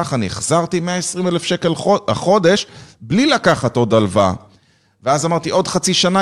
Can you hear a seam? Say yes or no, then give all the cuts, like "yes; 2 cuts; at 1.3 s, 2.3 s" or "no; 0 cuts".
no; 0 cuts